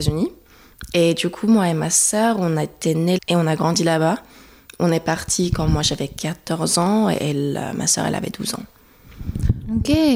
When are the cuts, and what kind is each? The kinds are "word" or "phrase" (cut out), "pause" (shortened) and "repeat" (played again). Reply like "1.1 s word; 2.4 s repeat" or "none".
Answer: 3.2 s word